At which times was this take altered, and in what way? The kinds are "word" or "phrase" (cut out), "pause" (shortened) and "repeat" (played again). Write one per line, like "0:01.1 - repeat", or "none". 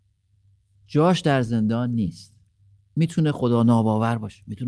none